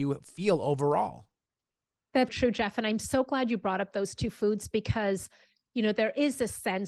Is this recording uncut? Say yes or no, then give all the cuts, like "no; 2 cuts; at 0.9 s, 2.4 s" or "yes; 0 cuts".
no; 1 cut; at 2.3 s